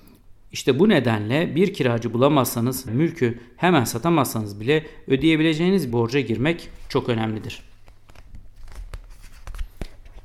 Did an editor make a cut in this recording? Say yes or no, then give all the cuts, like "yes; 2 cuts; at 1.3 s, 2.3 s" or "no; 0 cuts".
yes; 2 cuts; at 2.9 s, 5.9 s